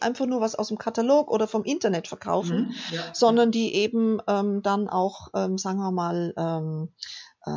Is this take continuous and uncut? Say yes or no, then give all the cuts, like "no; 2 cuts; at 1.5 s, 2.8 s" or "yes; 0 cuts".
yes; 0 cuts